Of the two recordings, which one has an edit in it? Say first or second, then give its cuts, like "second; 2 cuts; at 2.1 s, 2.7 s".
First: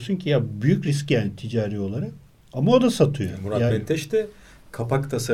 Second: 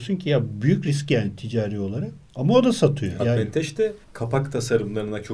second; 3 cuts; at 2.3 s, 3.2 s, 4.0 s